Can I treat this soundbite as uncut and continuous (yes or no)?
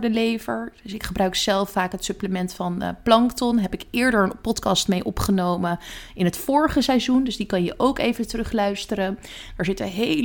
yes